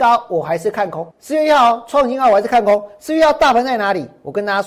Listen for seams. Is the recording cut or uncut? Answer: cut